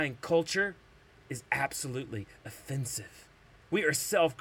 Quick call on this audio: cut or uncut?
uncut